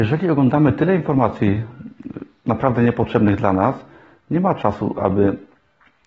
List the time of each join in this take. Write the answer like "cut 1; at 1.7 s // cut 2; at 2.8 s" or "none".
none